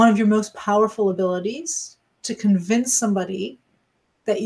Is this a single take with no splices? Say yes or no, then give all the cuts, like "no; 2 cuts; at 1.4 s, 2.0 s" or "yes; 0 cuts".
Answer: yes; 0 cuts